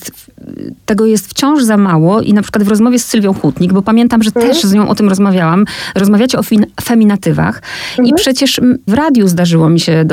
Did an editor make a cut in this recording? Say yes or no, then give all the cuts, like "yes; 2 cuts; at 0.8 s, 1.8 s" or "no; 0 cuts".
yes; 1 cut; at 8.9 s